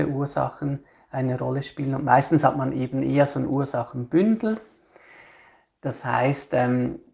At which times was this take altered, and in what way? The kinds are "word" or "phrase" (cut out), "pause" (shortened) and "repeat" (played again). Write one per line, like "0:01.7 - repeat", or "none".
none

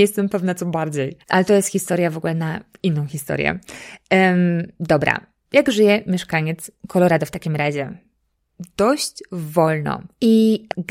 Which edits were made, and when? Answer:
0:01.2 - pause

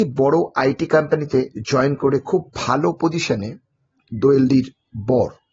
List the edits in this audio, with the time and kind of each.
0:02.5 - pause

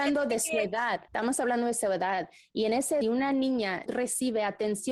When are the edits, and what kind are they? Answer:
0:01.1 - pause
0:03.0 - phrase
0:03.9 - word

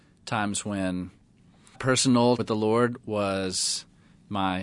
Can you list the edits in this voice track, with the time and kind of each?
0:01.7 - word
0:02.4 - word

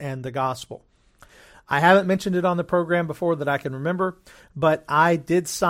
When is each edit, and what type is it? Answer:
none

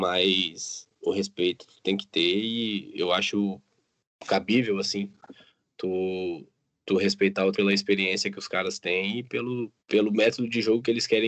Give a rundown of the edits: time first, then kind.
0:00.9 - pause
0:07.5 - word
0:09.8 - pause

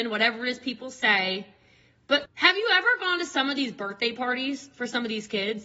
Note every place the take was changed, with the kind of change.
0:02.2 - word

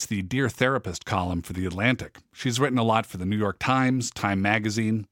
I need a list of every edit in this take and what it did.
none

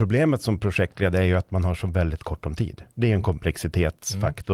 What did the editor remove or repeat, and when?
0:02.9 - pause

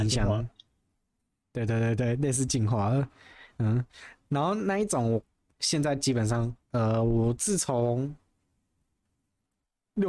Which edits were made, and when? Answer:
0:06.6 - pause

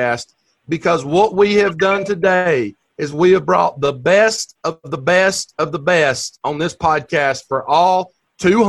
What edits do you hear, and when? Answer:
none

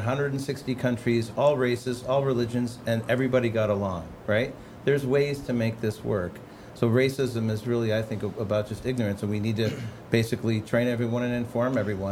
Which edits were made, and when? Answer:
none

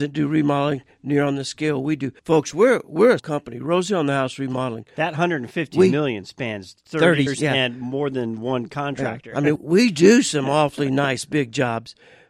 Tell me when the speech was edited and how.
0:02.2 - pause
0:03.2 - word
0:06.8 - pause
0:07.3 - word
0:09.6 - word

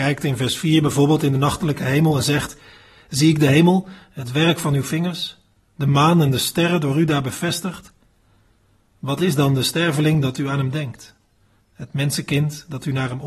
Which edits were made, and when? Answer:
none

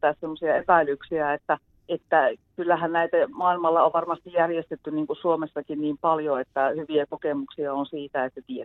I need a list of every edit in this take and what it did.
0:01.7 - pause

